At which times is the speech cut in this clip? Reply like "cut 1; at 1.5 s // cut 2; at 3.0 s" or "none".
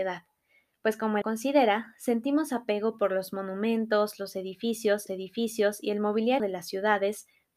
cut 1; at 1.2 s // cut 2; at 5.1 s // cut 3; at 6.4 s